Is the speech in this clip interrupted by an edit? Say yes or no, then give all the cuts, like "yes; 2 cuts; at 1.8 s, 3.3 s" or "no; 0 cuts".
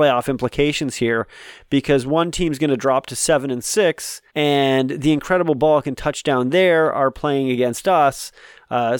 yes; 1 cut; at 4.3 s